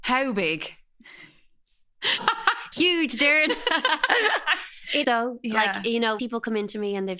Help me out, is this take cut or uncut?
cut